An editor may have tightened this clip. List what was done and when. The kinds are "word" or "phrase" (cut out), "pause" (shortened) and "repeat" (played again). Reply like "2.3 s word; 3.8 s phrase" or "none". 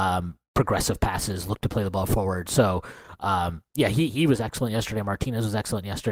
none